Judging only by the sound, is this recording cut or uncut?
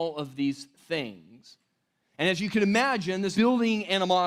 cut